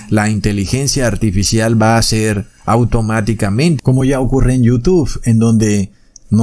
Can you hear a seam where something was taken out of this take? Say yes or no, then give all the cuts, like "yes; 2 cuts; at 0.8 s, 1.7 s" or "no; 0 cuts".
no; 0 cuts